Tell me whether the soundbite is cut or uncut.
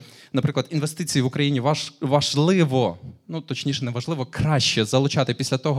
uncut